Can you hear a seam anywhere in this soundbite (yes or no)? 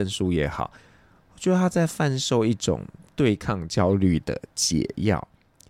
no